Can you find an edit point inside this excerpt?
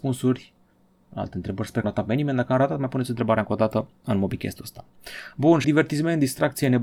yes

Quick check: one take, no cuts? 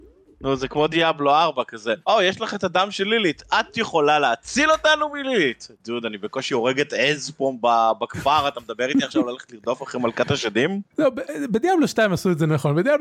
no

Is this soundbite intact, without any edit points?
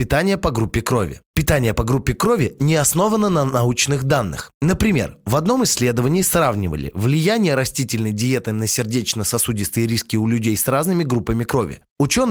yes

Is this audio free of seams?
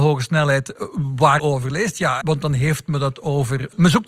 no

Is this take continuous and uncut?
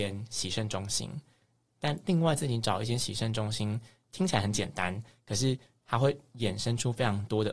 yes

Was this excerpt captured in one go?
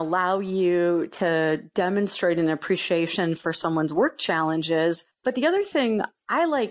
no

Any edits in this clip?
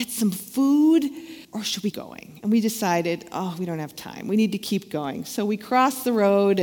yes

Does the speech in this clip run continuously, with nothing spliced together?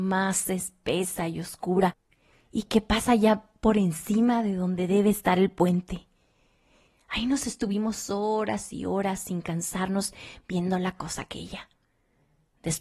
yes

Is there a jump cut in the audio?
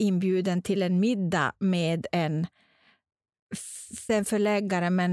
yes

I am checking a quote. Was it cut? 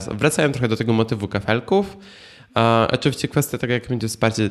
no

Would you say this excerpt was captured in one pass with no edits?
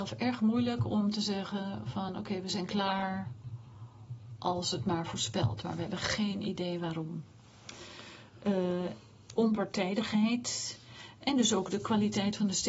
yes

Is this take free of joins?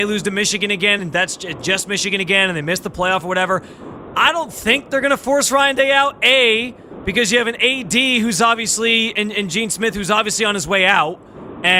yes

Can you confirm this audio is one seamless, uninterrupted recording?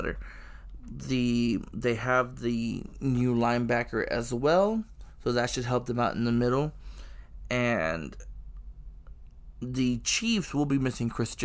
yes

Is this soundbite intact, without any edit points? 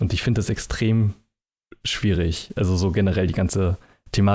yes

